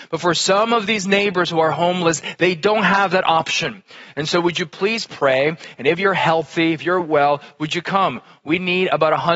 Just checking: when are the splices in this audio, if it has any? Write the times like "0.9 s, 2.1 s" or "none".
none